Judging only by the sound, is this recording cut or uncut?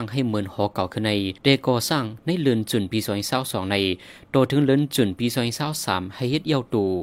cut